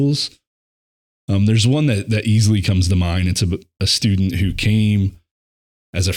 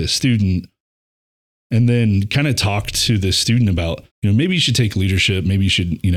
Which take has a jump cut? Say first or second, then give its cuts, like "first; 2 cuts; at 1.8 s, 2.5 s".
second; 1 cut; at 4.1 s